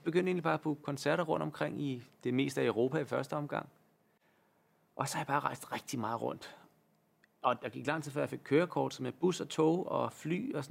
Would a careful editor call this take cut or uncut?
uncut